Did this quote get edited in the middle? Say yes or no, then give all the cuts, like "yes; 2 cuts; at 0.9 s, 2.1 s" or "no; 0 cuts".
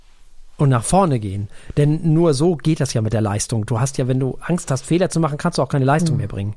no; 0 cuts